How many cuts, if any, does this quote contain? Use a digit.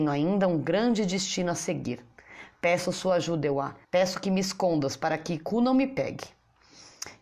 1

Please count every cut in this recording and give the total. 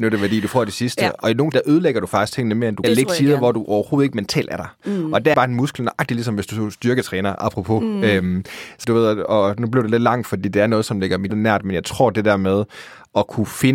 5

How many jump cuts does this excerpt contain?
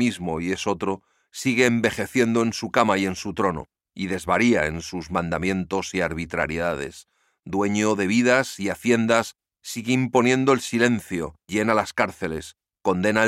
1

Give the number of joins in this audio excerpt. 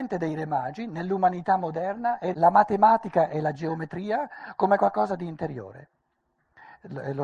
1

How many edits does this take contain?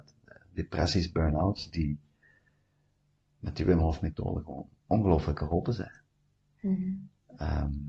1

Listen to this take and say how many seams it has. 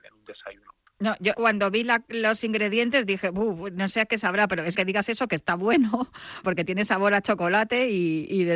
3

